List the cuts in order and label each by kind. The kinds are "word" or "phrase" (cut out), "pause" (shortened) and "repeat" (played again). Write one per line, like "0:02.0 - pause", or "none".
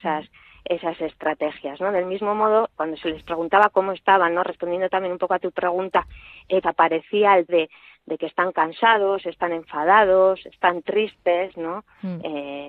0:02.7 - word
0:06.6 - phrase
0:07.5 - word